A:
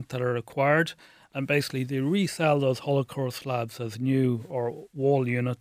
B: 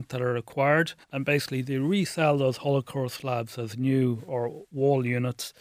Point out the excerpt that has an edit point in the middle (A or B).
B